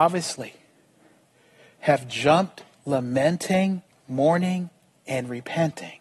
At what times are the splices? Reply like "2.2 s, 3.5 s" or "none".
3.9 s